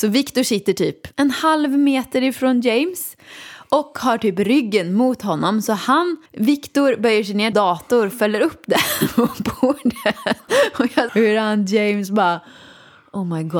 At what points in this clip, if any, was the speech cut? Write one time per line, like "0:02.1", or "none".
0:01.1
0:06.3
0:07.5
0:11.1